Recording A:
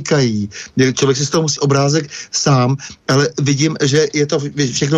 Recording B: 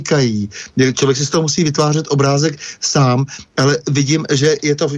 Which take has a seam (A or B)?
A